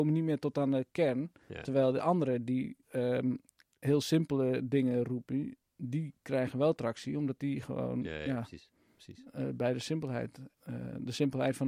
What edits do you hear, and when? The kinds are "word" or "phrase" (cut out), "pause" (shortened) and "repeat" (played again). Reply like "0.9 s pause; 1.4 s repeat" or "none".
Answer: 2.8 s pause; 10.6 s pause